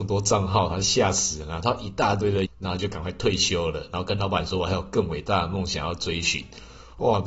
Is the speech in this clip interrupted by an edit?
yes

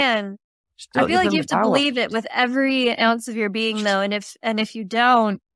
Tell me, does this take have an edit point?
no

